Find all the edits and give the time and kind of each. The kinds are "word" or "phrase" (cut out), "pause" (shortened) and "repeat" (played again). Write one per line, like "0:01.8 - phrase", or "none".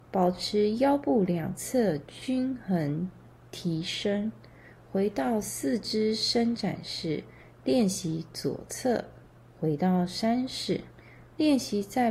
none